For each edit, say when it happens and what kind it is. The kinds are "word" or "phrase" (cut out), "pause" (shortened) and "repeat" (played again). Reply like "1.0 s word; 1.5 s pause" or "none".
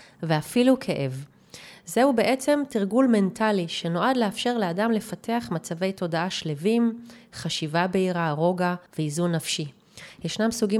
8.9 s pause